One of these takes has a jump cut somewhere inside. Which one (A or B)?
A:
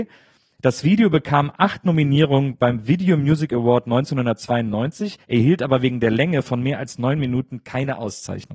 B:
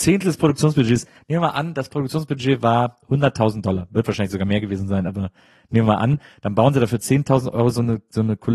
A